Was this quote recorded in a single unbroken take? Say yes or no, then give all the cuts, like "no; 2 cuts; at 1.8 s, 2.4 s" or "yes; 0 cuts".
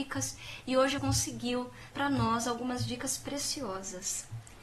no; 2 cuts; at 1.0 s, 1.9 s